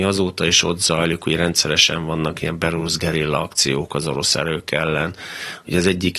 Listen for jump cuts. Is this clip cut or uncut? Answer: uncut